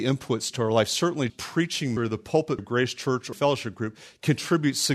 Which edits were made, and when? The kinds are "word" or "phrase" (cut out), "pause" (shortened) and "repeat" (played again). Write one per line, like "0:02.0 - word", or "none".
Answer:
0:01.3 - word
0:02.0 - word
0:02.6 - word
0:03.3 - word